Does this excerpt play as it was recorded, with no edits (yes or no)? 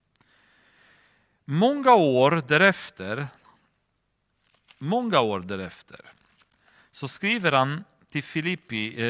yes